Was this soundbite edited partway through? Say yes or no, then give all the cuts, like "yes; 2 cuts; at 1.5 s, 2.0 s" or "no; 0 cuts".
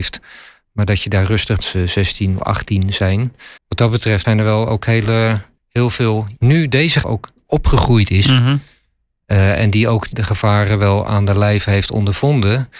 yes; 8 cuts; at 1.6 s, 2.4 s, 3.6 s, 4.2 s, 5.6 s, 6.3 s, 7.0 s, 10.1 s